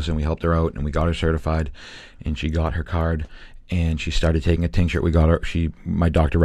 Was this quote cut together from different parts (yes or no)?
yes